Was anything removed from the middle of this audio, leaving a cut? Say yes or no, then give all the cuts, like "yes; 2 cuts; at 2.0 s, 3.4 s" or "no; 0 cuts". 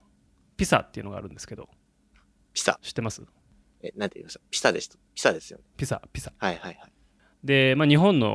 yes; 1 cut; at 5.7 s